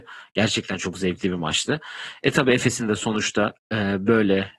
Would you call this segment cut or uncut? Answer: uncut